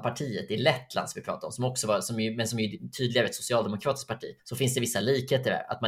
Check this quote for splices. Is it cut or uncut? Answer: cut